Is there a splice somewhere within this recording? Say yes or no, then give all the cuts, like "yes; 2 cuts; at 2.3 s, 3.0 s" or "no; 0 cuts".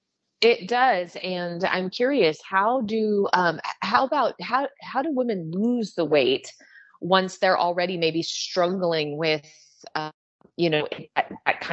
no; 0 cuts